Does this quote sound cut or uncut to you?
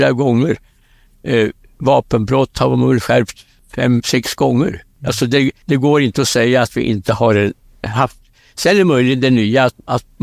uncut